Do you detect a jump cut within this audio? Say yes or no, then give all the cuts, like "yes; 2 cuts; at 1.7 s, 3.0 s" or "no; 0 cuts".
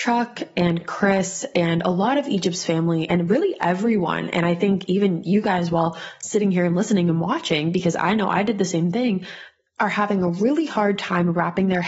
no; 0 cuts